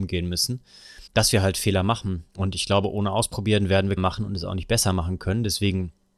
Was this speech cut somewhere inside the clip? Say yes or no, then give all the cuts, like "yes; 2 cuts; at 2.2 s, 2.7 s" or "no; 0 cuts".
yes; 3 cuts; at 1.1 s, 2.3 s, 4.0 s